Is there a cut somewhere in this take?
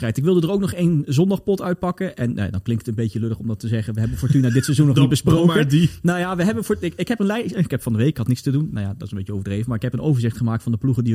yes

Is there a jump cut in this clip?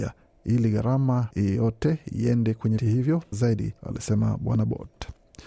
yes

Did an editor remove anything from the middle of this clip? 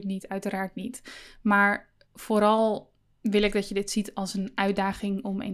no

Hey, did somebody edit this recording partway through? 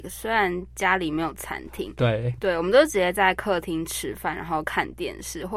no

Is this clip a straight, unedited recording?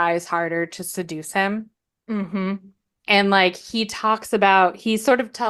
yes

